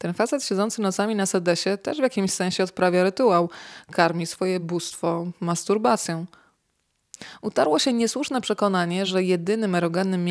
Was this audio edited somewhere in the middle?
no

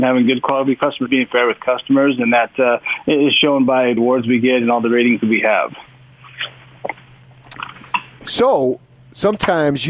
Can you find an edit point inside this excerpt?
yes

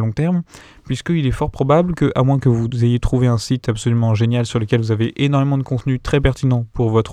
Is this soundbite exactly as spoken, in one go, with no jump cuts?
yes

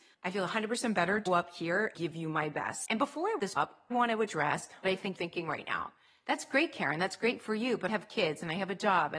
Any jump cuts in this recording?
yes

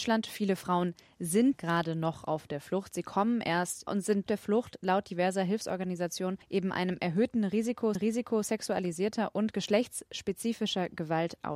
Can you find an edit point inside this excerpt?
yes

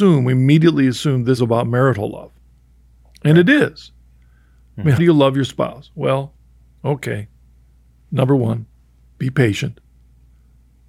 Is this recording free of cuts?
no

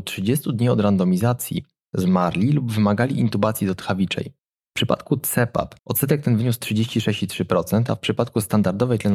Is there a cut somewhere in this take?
yes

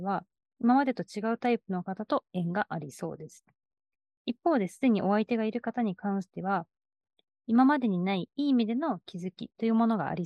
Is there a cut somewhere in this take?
no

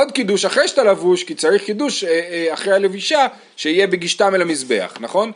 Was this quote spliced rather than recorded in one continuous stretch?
no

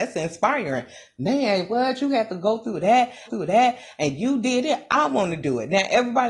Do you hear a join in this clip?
yes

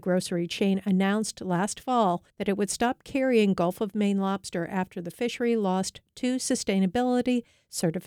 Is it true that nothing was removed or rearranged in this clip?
no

